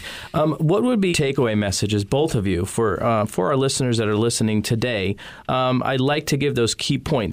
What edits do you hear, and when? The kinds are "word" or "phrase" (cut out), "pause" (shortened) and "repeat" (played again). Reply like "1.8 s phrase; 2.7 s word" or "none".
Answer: 1.1 s word